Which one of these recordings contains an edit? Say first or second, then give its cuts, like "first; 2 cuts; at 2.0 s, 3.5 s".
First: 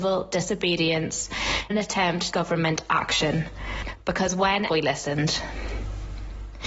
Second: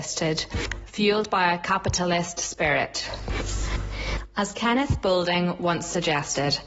first; 3 cuts; at 1.7 s, 2.3 s, 4.7 s